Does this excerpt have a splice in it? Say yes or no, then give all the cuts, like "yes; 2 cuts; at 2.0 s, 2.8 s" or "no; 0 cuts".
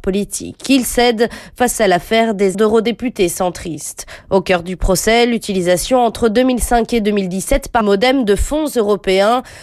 yes; 2 cuts; at 2.5 s, 7.8 s